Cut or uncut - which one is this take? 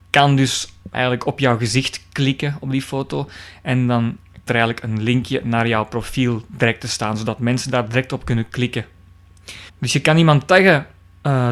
cut